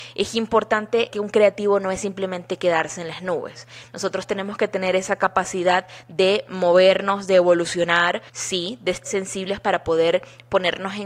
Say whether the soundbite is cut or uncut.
cut